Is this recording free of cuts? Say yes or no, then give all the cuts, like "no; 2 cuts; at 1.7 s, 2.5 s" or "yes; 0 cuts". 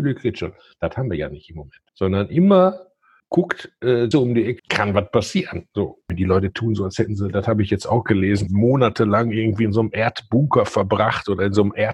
no; 5 cuts; at 1.9 s, 3.2 s, 4.1 s, 4.6 s, 8.5 s